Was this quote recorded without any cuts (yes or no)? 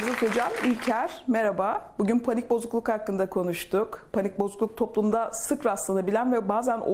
yes